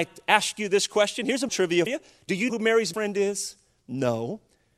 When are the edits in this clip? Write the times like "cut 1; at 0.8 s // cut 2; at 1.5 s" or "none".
cut 1; at 1.5 s // cut 2; at 1.9 s // cut 3; at 2.5 s // cut 4; at 2.9 s